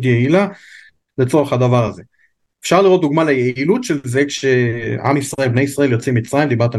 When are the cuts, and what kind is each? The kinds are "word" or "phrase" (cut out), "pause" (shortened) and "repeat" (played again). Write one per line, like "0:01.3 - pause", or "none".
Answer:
none